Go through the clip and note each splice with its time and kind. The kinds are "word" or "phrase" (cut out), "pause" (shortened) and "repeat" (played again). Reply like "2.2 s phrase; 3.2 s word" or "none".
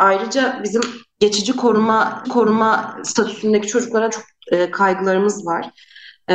2.2 s repeat; 4.1 s word